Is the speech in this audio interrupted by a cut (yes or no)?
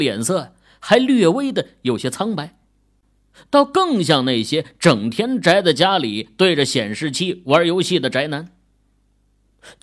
no